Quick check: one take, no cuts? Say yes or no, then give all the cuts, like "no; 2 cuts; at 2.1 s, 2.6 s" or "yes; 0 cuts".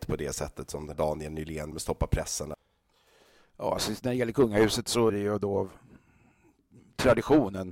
no; 3 cuts; at 0.9 s, 1.7 s, 5.1 s